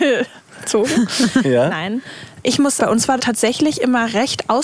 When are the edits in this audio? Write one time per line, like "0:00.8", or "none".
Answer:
0:02.8
0:03.2